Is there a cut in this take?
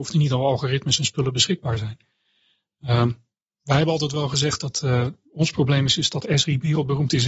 no; 0 cuts

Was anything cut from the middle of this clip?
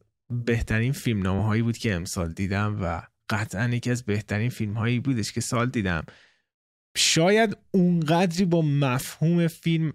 no; 0 cuts

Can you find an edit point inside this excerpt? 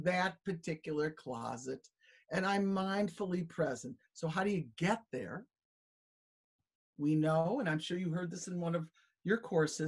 no; 0 cuts

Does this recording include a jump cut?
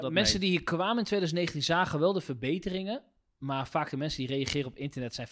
no; 0 cuts

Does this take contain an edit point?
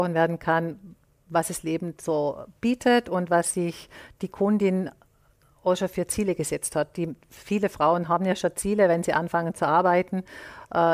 no; 0 cuts

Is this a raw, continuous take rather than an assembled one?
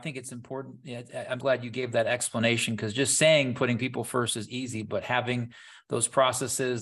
no; 1 cut; at 1.4 s

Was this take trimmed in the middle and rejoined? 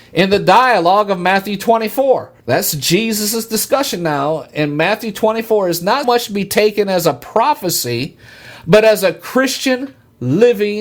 yes; 2 cuts; at 2.4 s, 6.0 s

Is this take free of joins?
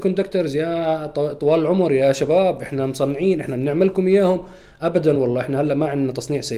yes; 0 cuts

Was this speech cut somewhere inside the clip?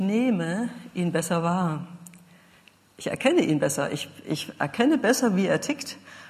no; 0 cuts

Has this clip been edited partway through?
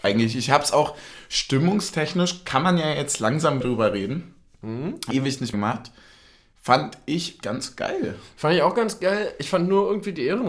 yes; 4 cuts; at 3.6 s, 5.1 s, 5.5 s, 7.4 s

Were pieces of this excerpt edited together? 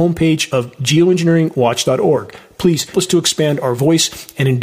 yes; 1 cut; at 2.9 s

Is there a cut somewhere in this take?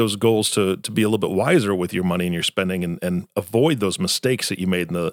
no; 0 cuts

